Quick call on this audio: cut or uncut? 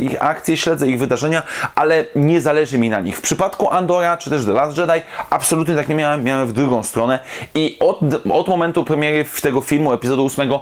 uncut